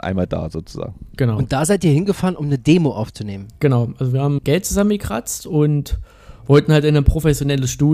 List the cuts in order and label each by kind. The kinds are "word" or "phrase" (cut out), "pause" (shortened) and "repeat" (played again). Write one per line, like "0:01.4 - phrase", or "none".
0:04.4 - word